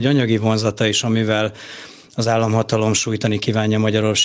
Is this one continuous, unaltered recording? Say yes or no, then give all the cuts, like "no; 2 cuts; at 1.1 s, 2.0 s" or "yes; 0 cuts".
yes; 0 cuts